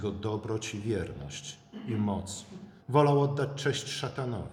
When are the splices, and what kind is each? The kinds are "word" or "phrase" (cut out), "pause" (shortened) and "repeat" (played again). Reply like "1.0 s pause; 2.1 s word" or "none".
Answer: 2.8 s pause